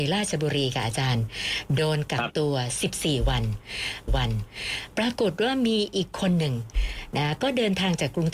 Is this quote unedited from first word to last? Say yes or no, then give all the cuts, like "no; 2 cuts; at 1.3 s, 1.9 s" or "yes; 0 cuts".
no; 1 cut; at 4.1 s